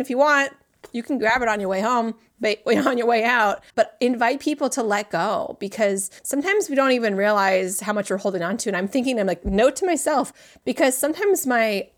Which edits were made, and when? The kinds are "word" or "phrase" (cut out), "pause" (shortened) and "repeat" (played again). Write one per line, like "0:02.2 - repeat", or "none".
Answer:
0:03.7 - pause
0:06.2 - pause

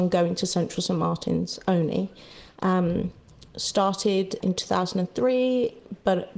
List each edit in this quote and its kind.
0:04.4 - word

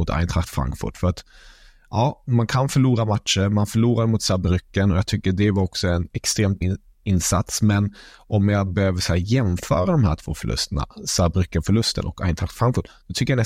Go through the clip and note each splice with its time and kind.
0:06.6 - word

